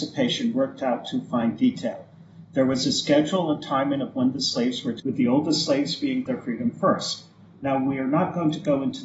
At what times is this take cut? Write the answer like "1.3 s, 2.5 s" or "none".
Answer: 5.0 s, 6.3 s